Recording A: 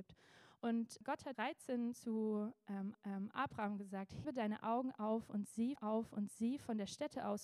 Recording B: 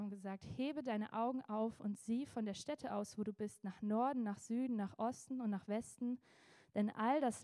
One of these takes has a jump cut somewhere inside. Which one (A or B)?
A